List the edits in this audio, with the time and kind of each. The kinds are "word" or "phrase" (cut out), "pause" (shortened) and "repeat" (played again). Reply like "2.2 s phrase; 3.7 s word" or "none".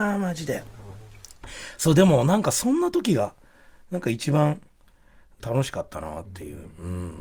none